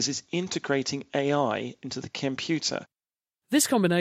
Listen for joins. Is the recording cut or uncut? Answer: uncut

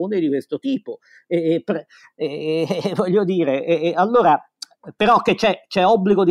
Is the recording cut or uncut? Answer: uncut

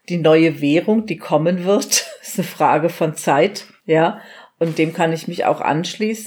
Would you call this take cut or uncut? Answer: uncut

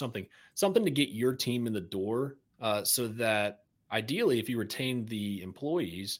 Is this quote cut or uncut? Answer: cut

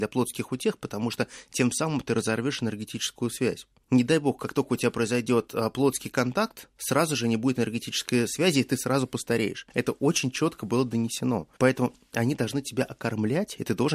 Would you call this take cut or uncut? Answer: cut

